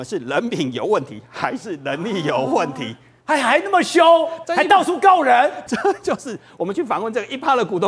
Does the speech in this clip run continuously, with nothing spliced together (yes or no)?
no